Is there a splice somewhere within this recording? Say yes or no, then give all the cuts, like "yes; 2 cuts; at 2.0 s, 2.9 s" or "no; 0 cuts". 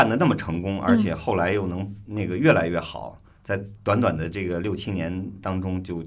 no; 0 cuts